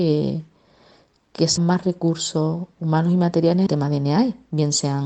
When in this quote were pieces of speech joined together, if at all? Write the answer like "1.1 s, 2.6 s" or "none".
1.6 s, 3.7 s

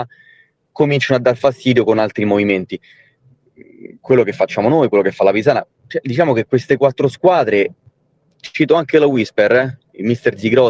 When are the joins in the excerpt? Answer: none

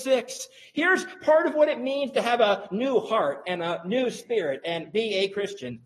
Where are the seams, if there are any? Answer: none

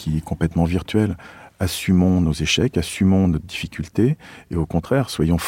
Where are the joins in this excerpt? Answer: none

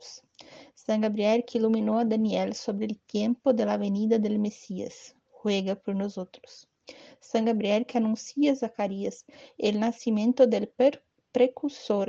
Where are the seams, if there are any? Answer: none

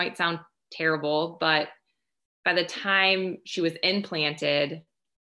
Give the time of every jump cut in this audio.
none

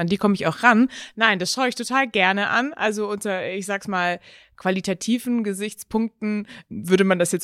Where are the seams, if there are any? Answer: none

